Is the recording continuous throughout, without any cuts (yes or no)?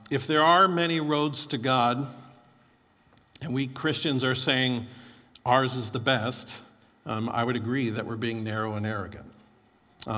yes